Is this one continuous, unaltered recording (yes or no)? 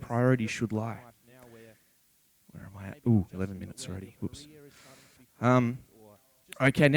yes